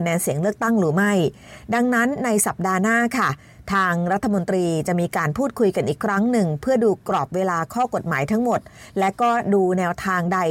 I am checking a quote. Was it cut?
no; 0 cuts

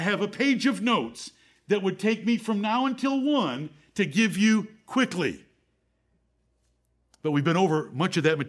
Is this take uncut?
yes; 0 cuts

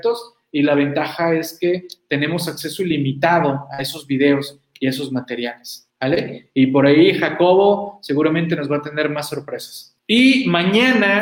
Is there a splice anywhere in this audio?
yes; 2 cuts; at 5.9 s, 10.0 s

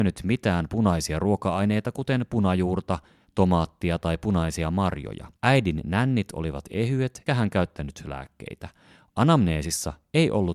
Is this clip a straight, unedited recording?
no; 2 cuts; at 5.4 s, 7.3 s

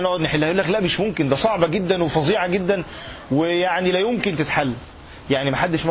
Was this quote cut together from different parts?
no; 0 cuts

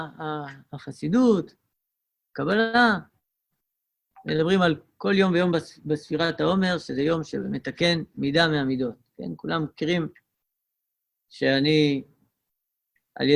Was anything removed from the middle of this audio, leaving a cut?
no; 0 cuts

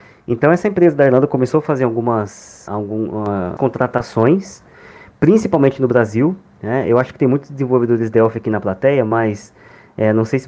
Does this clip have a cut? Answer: yes; 2 cuts; at 2.7 s, 3.6 s

